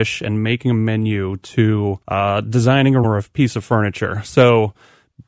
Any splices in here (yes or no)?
yes